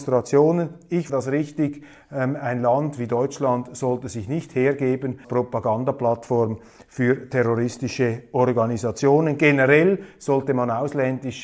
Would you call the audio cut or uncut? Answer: cut